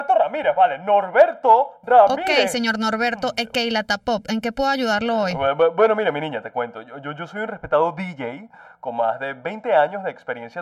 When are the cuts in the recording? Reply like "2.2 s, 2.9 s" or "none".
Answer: none